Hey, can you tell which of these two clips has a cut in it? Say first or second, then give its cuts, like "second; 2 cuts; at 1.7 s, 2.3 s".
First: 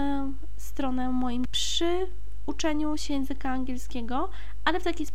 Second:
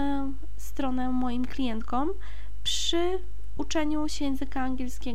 first; 1 cut; at 1.4 s